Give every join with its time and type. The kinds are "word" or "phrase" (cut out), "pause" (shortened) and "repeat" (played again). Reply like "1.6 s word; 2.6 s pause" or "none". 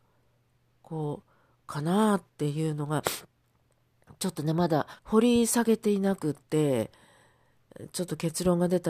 5.0 s pause